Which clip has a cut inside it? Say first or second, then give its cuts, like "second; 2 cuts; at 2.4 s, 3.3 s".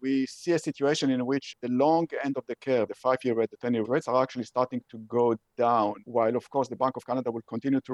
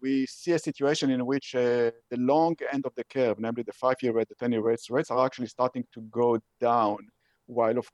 first; 4 cuts; at 1.5 s, 2.9 s, 3.8 s, 6.0 s